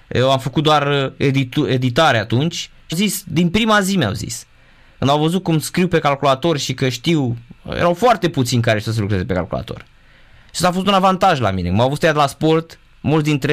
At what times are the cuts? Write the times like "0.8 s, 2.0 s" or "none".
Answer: 2.9 s